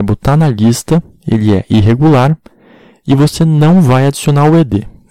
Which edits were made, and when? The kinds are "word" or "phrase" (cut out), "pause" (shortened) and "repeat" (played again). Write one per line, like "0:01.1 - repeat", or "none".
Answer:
none